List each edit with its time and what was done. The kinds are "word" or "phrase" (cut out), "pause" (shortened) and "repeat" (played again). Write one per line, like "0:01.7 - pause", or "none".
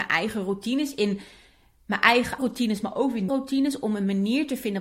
0:02.4 - word
0:03.3 - word